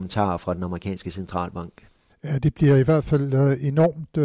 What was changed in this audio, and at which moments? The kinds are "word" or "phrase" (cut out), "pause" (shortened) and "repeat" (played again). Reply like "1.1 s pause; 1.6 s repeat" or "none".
none